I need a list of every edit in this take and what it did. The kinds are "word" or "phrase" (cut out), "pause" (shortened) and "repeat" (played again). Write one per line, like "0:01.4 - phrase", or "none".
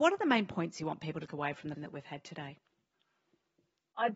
0:01.3 - word
0:01.8 - word